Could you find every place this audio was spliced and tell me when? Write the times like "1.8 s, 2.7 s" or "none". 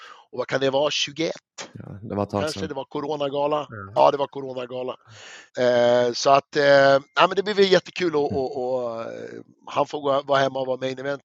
5.5 s